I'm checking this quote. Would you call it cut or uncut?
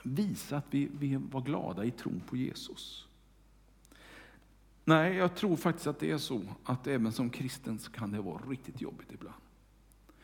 uncut